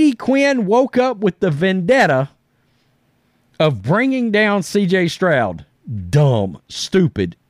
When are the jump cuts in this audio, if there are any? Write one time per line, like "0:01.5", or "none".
none